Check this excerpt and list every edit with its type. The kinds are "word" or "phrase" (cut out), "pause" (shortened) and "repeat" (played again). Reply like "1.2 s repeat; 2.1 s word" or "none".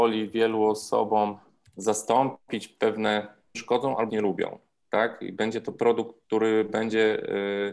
3.5 s phrase; 4.1 s word